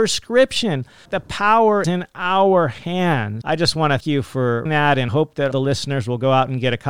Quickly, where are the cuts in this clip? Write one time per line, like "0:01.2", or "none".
0:01.1
0:01.8
0:03.4
0:04.0
0:04.7
0:05.1
0:05.5